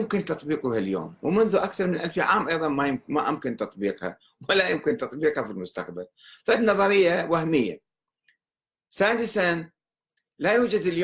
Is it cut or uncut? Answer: uncut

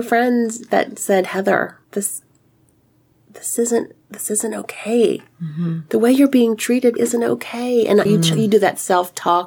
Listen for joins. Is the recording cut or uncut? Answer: cut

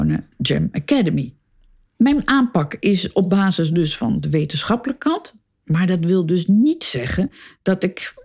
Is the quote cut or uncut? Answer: uncut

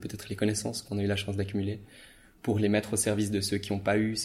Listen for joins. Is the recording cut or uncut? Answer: uncut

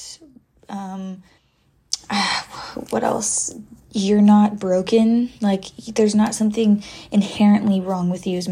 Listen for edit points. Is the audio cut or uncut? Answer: cut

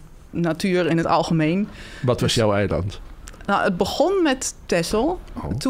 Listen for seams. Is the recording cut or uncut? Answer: uncut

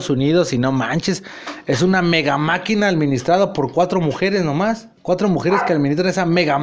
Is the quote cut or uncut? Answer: cut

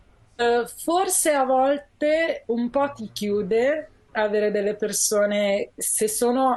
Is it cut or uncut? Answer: uncut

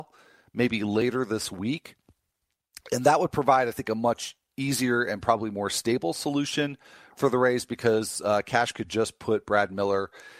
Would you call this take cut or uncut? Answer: uncut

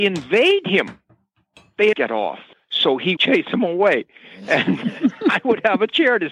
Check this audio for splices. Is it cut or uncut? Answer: cut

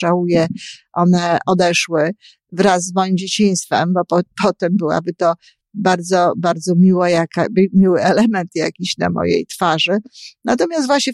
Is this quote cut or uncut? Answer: uncut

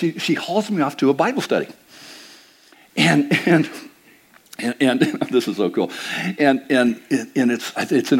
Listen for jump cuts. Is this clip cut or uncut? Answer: uncut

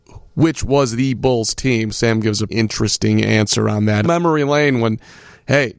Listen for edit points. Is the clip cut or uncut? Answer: cut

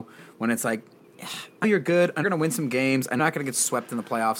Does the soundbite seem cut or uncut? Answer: cut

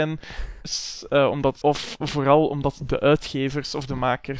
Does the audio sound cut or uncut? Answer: cut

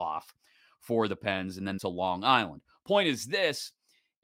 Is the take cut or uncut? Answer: cut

